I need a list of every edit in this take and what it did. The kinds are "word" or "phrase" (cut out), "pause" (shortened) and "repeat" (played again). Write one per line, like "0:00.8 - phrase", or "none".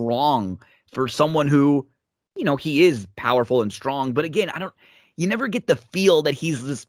none